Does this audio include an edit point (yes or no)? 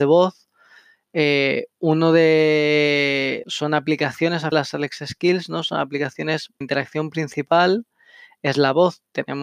yes